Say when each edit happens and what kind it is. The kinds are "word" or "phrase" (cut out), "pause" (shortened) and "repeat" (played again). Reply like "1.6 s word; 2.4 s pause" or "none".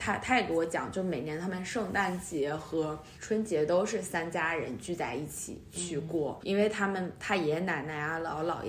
3.2 s pause; 6.4 s word